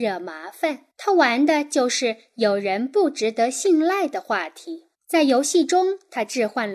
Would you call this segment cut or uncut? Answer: cut